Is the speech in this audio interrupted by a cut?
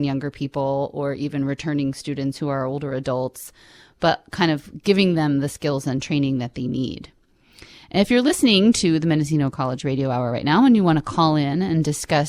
no; 0 cuts

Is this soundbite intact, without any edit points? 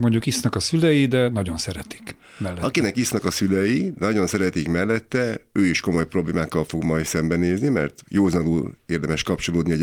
yes; 0 cuts

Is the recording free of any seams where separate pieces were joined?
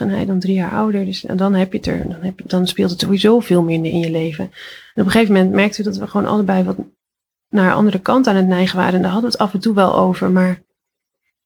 yes; 0 cuts

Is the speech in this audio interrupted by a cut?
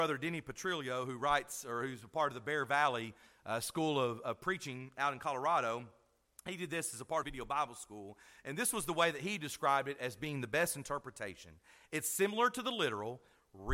yes; 1 cut; at 7.2 s

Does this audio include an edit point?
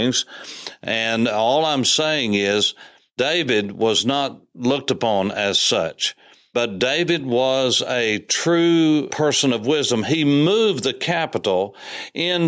no; 0 cuts

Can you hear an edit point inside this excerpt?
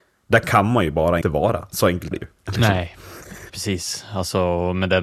yes; 3 cuts; at 1.2 s, 2.1 s, 3.5 s

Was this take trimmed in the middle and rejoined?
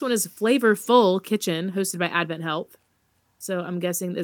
no; 0 cuts

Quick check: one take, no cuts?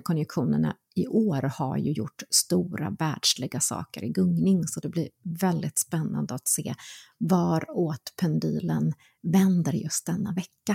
yes; 0 cuts

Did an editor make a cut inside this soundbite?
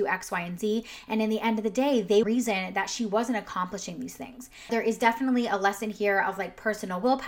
yes; 2 cuts; at 2.2 s, 4.7 s

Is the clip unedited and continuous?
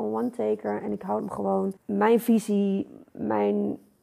no; 2 cuts; at 1.2 s, 1.8 s

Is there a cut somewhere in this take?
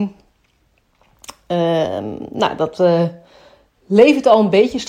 no; 0 cuts

